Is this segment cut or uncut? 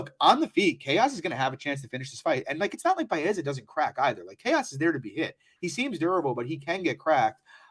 uncut